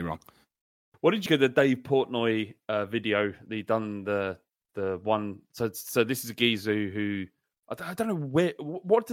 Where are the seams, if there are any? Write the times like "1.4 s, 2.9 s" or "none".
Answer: 1.3 s